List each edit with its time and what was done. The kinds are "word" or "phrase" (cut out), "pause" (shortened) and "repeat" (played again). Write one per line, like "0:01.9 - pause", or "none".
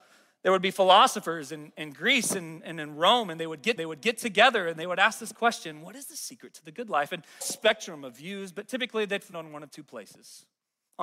0:03.8 - repeat
0:07.4 - phrase
0:09.3 - word